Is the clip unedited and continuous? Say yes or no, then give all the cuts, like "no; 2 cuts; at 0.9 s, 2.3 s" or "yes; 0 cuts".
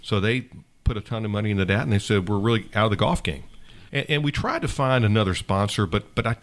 no; 1 cut; at 3.9 s